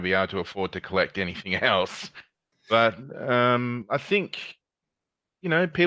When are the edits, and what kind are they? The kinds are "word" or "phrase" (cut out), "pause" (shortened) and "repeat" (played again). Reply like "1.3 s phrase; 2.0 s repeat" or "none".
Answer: none

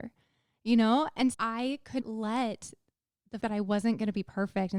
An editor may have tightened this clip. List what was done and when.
1.3 s word; 2.0 s word; 3.4 s word

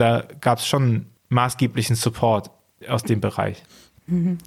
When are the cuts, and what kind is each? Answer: 1.2 s pause; 2.8 s word

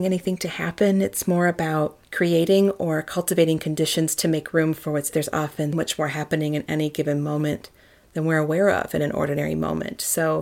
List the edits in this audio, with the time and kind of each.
2.0 s pause; 5.1 s phrase; 5.7 s word

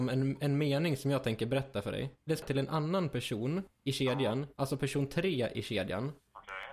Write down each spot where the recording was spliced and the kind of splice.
2.4 s word

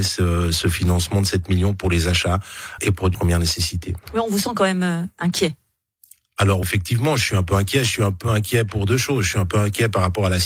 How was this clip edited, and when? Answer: 2.8 s word; 3.1 s word; 6.6 s word

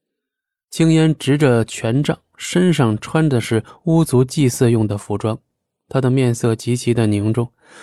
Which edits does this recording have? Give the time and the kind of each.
none

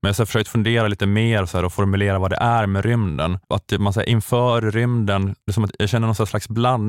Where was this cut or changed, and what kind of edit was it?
3.4 s pause; 5.4 s pause

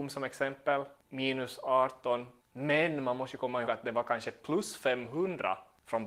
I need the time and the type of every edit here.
3.6 s word

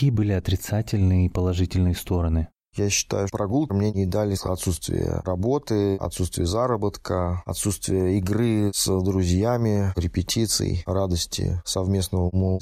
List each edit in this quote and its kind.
3.3 s word; 3.7 s word; 4.4 s phrase

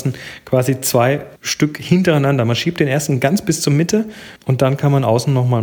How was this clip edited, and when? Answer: 1.4 s pause; 4.4 s pause

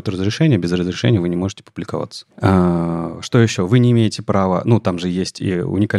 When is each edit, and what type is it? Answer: 2.3 s pause

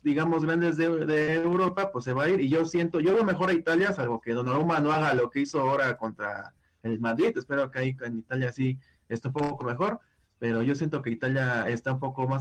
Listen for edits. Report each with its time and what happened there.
none

